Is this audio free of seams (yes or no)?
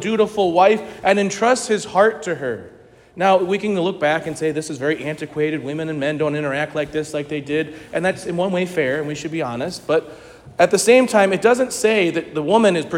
yes